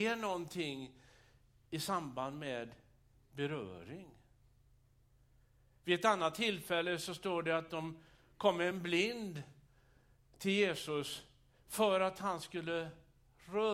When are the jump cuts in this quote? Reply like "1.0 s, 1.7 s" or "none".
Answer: none